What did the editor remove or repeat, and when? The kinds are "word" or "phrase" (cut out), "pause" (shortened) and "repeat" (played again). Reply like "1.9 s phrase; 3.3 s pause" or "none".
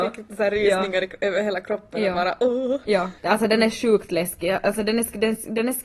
3.2 s pause